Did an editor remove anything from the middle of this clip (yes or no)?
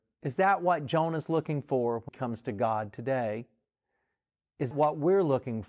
yes